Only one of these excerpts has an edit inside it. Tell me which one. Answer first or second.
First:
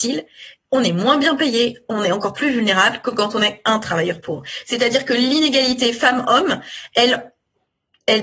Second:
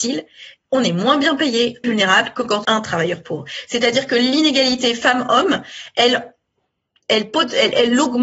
second